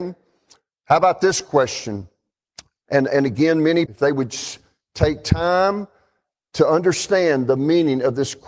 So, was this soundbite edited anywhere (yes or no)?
yes